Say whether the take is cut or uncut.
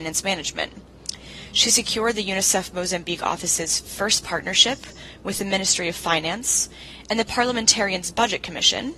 uncut